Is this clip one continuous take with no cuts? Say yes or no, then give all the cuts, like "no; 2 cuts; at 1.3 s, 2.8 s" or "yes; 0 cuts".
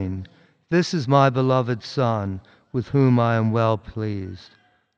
yes; 0 cuts